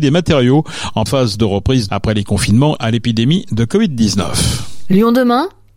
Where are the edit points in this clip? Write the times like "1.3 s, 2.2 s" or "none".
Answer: 1.1 s, 1.9 s, 2.8 s